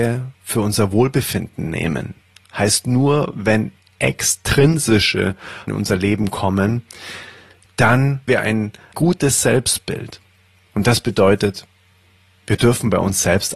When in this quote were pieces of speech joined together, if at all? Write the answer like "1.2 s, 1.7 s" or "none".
5.7 s, 8.3 s, 8.9 s

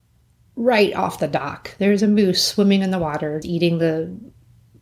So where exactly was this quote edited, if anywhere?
3.4 s

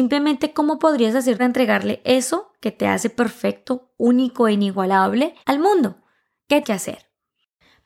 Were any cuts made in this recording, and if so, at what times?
1.4 s, 5.4 s, 6.6 s

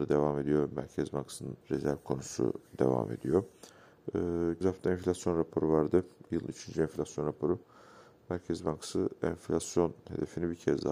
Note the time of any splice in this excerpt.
1.6 s, 2.7 s, 4.6 s

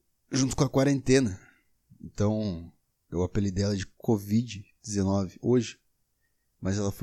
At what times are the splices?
none

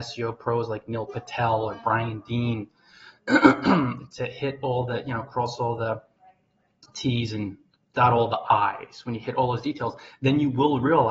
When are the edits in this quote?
none

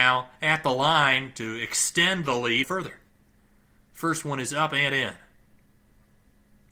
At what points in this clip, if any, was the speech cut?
2.6 s

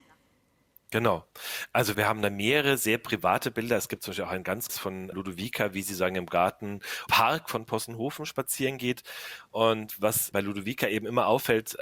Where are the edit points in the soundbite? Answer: 1.9 s, 4.7 s, 5.1 s, 7.1 s, 10.3 s

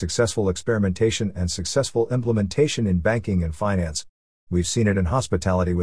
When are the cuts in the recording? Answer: none

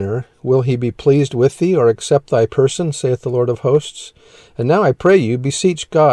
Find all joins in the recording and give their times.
none

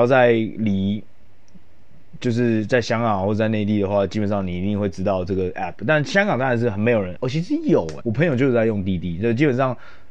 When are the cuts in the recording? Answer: 7.2 s, 8.0 s

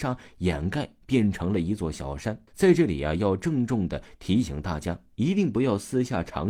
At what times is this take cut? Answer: 2.5 s

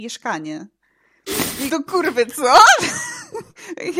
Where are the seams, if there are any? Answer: 1.7 s

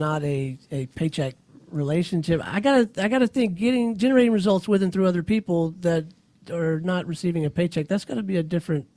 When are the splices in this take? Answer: none

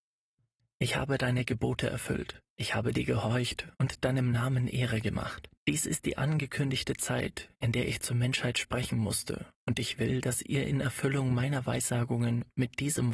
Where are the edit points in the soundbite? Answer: 2.5 s, 3.7 s, 5.6 s, 7.5 s, 9.5 s

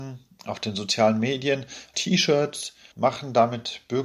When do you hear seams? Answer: 1.9 s, 2.9 s

